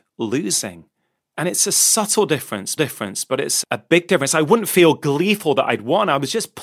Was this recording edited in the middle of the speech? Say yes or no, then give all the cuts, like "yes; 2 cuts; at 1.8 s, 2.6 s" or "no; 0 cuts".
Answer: yes; 2 cuts; at 2.8 s, 3.6 s